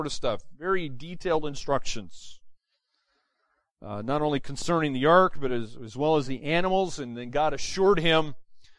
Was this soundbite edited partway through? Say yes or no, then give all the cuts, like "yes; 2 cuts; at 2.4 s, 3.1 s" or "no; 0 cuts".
no; 0 cuts